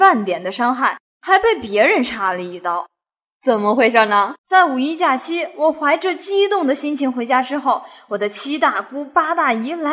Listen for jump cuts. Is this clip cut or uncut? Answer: cut